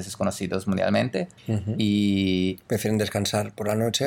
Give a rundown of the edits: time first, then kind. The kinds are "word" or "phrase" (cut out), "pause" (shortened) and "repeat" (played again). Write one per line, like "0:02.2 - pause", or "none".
0:01.4 - pause